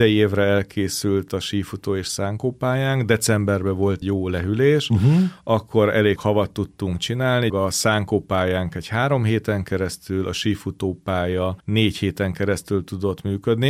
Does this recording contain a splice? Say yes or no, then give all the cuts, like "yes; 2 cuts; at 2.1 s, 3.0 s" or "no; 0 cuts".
yes; 4 cuts; at 4.0 s, 6.2 s, 7.5 s, 11.6 s